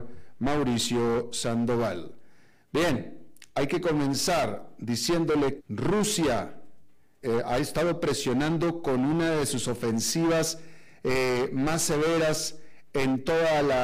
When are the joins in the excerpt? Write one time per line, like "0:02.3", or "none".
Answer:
0:05.6
0:07.2